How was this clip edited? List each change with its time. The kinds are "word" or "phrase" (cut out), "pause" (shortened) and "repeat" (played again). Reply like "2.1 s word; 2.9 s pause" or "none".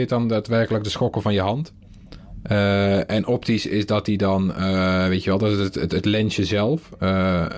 none